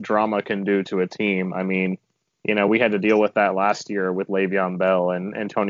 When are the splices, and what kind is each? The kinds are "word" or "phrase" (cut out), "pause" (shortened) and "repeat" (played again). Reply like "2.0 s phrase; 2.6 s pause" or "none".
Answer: none